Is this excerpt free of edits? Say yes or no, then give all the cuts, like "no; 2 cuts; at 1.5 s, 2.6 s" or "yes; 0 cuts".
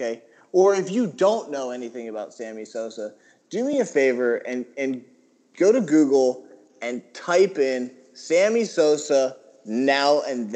yes; 0 cuts